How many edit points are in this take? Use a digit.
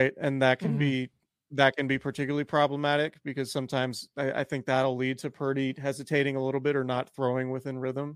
0